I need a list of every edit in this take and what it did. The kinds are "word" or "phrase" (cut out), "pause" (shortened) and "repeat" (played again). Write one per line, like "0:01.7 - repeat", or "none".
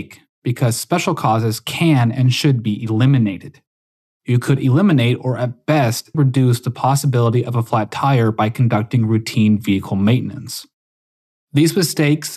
0:06.1 - word